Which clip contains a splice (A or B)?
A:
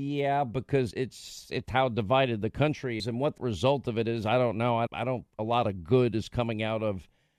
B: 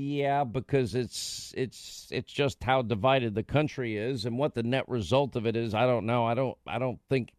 A